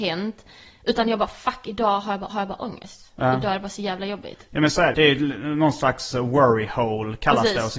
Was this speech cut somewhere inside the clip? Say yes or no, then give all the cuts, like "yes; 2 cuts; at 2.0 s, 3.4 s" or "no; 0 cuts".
yes; 2 cuts; at 2.3 s, 4.9 s